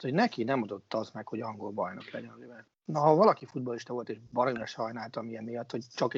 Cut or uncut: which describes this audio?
cut